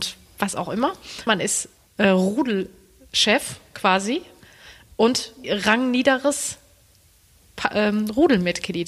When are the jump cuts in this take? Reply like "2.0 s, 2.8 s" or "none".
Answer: 1.3 s, 1.8 s, 5.4 s